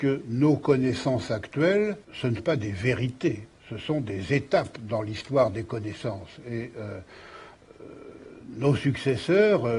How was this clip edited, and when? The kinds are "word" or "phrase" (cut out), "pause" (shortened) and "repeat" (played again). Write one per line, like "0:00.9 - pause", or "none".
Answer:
0:02.0 - pause
0:02.4 - word